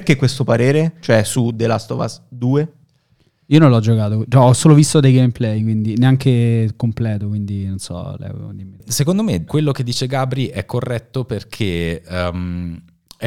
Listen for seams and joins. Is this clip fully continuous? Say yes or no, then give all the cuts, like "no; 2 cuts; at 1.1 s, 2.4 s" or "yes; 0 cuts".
yes; 0 cuts